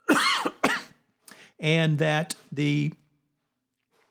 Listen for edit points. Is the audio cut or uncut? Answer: uncut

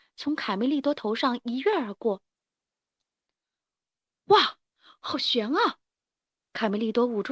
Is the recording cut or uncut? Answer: uncut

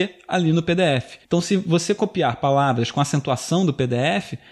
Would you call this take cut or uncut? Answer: cut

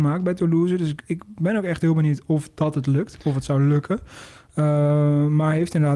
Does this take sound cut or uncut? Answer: uncut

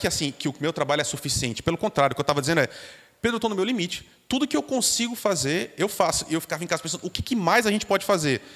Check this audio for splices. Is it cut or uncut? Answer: uncut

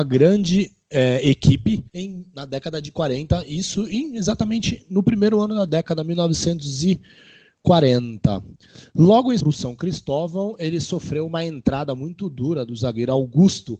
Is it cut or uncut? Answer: cut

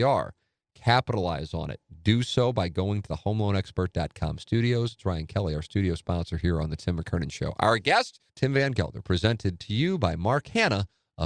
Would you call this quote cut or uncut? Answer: cut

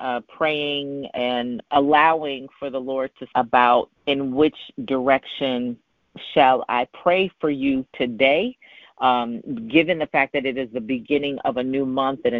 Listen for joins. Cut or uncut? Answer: cut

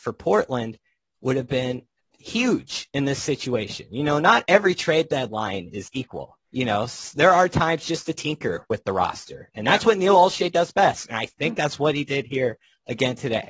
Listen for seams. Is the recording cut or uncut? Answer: cut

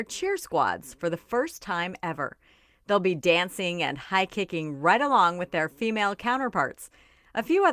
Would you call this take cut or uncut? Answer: uncut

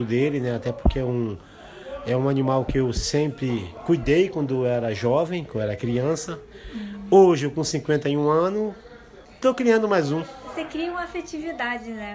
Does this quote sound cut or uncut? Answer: cut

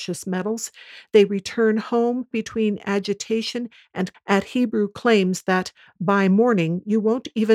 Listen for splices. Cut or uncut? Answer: cut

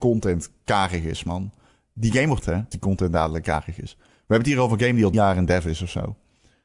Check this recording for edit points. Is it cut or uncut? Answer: cut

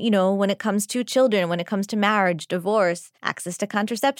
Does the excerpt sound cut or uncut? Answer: cut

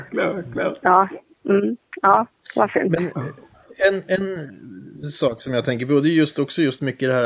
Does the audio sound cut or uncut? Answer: uncut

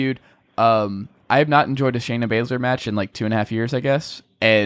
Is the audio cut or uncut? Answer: uncut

